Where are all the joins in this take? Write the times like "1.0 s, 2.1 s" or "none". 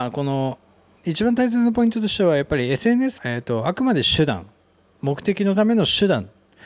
3.2 s

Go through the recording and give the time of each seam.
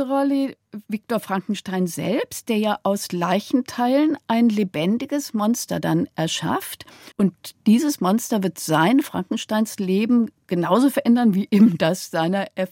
7.1 s

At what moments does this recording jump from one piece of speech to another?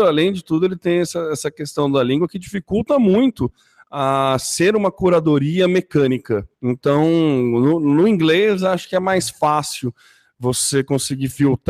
6.5 s

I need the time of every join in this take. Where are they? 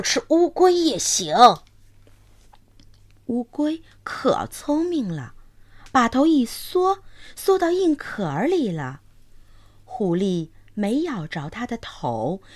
none

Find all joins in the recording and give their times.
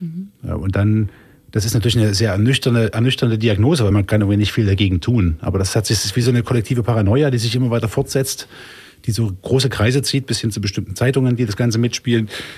none

